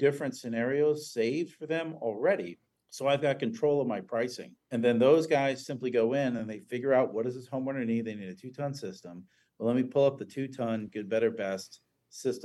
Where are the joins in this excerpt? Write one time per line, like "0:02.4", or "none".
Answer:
none